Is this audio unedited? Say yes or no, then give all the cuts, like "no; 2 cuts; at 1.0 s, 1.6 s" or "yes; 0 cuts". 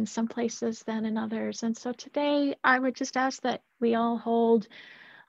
yes; 0 cuts